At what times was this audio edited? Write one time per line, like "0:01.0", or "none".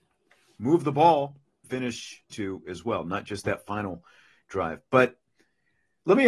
0:01.6
0:02.3